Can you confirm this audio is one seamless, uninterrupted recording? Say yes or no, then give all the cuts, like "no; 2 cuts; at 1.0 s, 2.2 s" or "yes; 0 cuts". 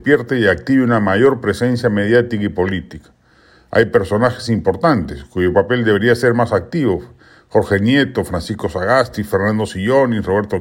yes; 0 cuts